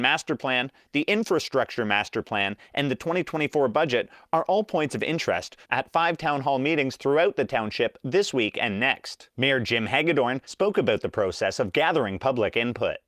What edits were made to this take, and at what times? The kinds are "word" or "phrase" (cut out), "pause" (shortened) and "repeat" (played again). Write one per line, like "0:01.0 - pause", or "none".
none